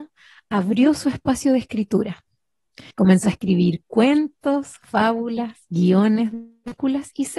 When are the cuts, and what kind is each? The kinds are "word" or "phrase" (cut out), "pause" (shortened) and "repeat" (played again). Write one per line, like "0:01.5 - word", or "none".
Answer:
0:02.9 - pause